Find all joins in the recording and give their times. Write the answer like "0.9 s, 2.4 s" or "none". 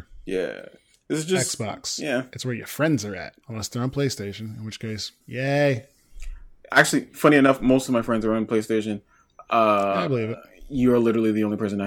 3.4 s, 5.2 s